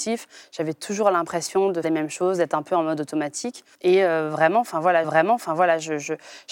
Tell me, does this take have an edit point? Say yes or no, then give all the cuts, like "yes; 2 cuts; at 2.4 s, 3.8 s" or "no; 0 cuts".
yes; 3 cuts; at 1.8 s, 3.7 s, 5.0 s